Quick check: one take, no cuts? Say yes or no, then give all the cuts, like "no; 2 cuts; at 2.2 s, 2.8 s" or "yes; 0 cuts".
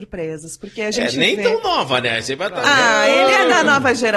yes; 0 cuts